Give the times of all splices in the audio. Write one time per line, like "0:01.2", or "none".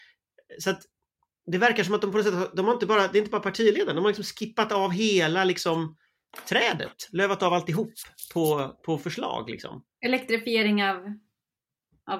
none